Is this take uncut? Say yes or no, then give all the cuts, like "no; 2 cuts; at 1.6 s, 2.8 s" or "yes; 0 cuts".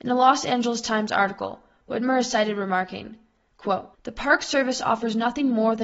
no; 1 cut; at 3.9 s